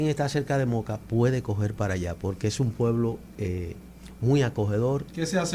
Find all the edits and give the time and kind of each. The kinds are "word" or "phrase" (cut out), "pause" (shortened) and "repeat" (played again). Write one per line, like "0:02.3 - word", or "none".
none

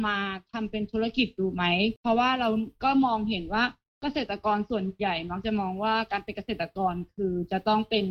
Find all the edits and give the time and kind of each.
none

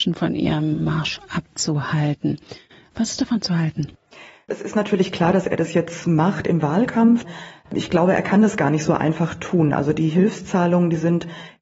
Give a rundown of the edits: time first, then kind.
none

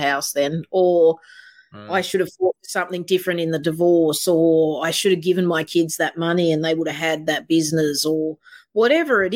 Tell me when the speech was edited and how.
none

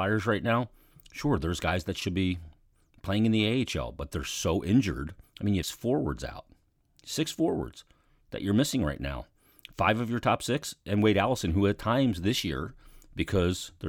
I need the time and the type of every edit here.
0:05.2 - pause
0:05.6 - phrase

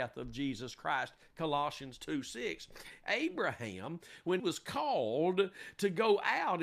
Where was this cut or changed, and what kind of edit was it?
0:04.4 - word

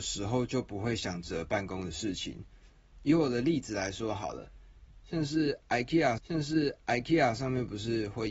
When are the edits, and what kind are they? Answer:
0:06.2 - repeat

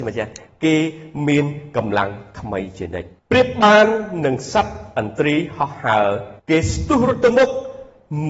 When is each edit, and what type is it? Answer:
0:03.2 - pause
0:06.4 - pause

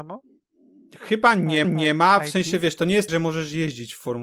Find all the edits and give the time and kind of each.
0:01.6 - repeat
0:03.1 - word

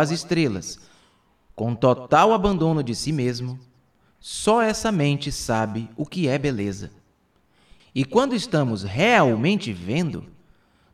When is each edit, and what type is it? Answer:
none

